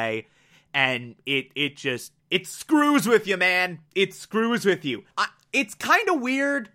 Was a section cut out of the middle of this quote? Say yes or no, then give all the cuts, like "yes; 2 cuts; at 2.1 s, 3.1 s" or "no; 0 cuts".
yes; 3 cuts; at 2.2 s, 3.9 s, 5.1 s